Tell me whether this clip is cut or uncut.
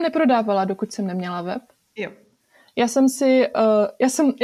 uncut